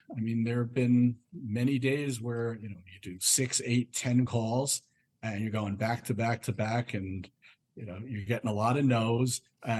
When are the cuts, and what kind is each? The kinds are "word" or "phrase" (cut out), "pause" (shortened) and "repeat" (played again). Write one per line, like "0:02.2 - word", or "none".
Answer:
none